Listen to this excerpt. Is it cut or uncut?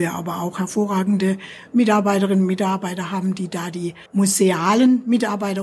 cut